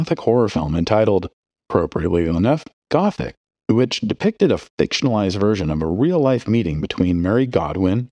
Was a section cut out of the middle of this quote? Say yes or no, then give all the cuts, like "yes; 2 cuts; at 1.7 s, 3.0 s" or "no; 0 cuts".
no; 0 cuts